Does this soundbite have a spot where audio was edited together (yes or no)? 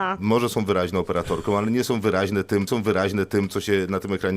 yes